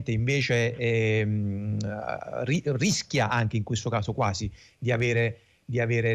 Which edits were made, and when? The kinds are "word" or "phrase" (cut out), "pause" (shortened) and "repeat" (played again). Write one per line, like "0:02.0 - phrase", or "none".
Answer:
none